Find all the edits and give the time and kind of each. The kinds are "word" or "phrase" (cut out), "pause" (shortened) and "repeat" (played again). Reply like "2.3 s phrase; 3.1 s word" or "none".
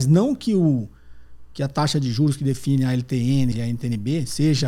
3.5 s phrase